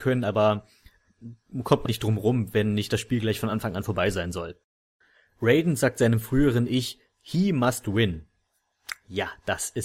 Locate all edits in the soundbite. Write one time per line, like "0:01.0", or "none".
0:01.9